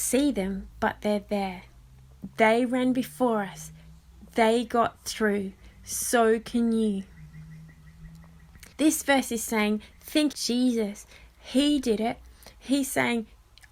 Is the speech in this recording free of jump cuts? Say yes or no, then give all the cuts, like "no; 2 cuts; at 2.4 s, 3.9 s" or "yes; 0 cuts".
no; 2 cuts; at 8.7 s, 10.3 s